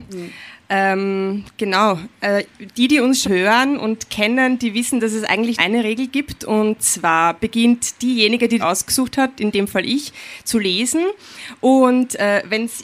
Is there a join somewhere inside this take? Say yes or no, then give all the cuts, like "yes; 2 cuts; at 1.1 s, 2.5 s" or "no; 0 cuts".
yes; 3 cuts; at 3.2 s, 5.6 s, 8.6 s